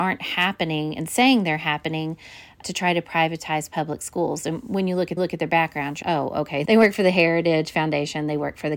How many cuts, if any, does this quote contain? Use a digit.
4